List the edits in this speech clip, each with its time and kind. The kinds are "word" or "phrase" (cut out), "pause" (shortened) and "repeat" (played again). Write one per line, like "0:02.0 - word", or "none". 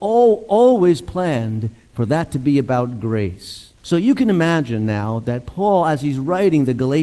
0:03.8 - pause